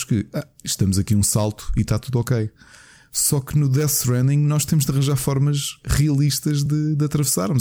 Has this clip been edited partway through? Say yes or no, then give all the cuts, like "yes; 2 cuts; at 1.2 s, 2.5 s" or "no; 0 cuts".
no; 0 cuts